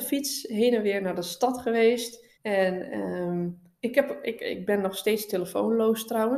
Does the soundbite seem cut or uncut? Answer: cut